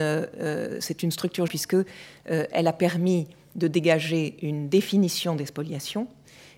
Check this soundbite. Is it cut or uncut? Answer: cut